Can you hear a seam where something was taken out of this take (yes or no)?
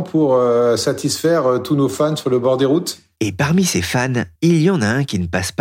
yes